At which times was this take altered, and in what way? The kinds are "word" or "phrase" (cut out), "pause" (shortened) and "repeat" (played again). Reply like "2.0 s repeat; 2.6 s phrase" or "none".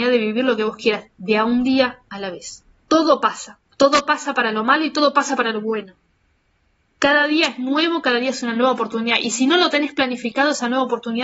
1.1 s pause; 2.8 s pause; 3.6 s pause